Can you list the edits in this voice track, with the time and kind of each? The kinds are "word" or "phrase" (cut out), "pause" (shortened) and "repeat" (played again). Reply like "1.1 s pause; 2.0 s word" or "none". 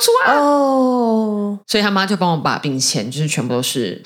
1.6 s word